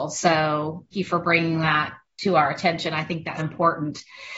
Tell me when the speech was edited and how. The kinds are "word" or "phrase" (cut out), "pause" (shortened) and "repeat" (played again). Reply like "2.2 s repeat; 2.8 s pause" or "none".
0.9 s word; 3.4 s word